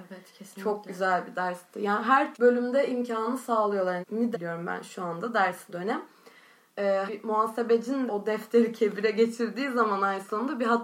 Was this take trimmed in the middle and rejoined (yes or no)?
yes